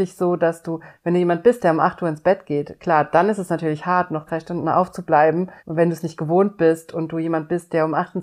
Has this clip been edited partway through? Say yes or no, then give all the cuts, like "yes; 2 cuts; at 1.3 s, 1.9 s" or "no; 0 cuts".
yes; 2 cuts; at 4.3 s, 5.6 s